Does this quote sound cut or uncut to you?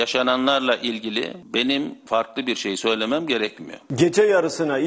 uncut